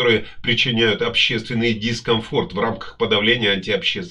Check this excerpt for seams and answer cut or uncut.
uncut